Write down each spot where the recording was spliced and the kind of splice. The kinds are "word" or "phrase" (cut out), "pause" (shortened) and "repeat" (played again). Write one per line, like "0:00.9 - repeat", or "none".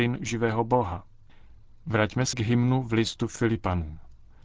0:02.3 - word